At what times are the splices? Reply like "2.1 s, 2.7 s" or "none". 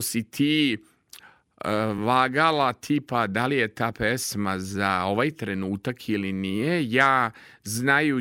none